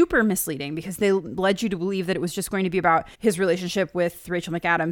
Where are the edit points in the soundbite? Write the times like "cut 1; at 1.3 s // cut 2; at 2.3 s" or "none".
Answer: cut 1; at 3.1 s